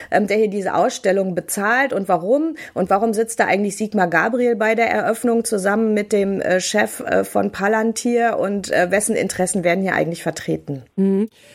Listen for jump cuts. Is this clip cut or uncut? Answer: uncut